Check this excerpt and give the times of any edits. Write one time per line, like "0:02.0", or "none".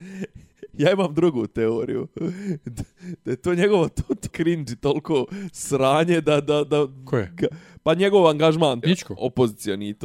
0:04.3
0:08.8